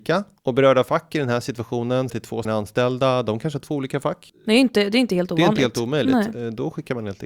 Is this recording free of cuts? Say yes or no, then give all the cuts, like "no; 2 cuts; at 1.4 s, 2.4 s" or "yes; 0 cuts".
no; 2 cuts; at 2.1 s, 2.4 s